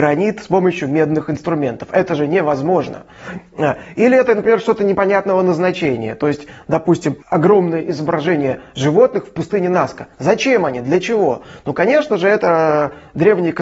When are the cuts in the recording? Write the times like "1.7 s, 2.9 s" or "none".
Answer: 7.2 s